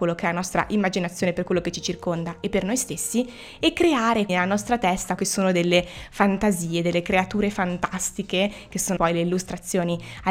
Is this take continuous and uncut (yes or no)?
no